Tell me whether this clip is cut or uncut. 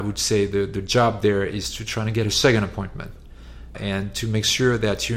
cut